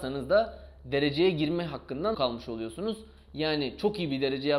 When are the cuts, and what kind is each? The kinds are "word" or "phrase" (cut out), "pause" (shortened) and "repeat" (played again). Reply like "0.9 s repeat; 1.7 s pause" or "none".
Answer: 2.1 s word